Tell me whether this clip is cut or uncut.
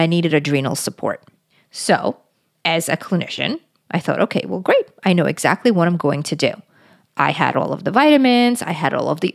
uncut